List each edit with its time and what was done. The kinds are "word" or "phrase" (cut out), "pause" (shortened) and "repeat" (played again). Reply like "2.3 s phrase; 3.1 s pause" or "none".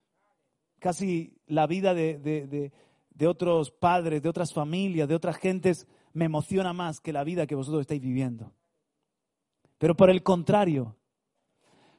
none